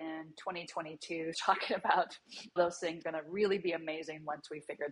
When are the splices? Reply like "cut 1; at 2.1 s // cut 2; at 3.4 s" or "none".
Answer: cut 1; at 1.3 s // cut 2; at 2.6 s // cut 3; at 3.0 s